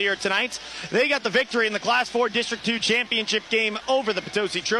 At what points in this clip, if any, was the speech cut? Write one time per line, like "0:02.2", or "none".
none